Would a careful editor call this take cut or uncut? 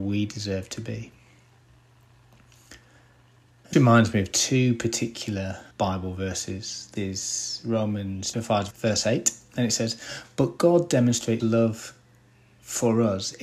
cut